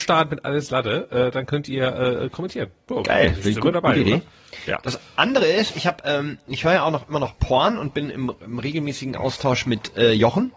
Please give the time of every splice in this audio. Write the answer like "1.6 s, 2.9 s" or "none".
none

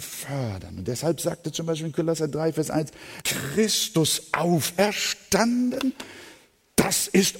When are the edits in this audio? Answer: 3.2 s

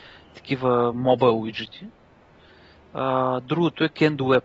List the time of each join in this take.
none

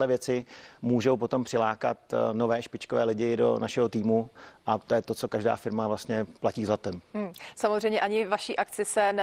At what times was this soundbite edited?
6.4 s

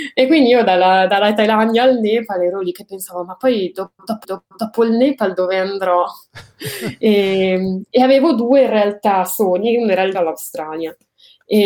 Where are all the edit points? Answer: 4.2 s, 10.1 s

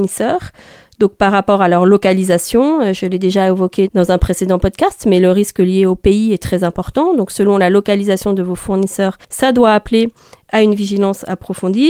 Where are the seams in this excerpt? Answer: 9.2 s

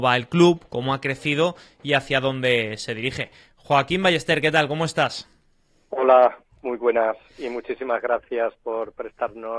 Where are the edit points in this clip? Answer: none

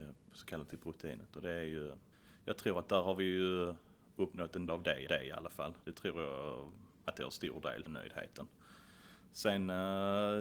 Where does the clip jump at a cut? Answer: 2.1 s, 4.7 s, 5.1 s, 5.8 s, 6.9 s, 7.9 s

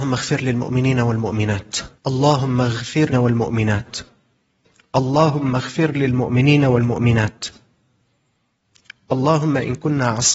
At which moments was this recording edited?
2.0 s, 3.1 s

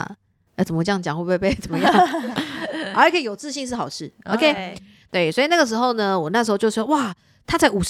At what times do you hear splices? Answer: none

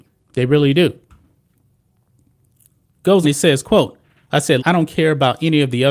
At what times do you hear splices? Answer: 3.2 s, 4.6 s

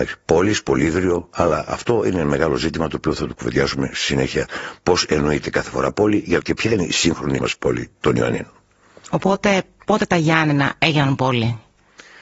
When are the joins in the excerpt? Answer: 6.4 s, 7.4 s

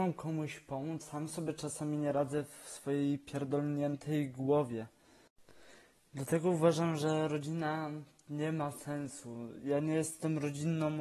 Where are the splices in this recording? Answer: 1.0 s

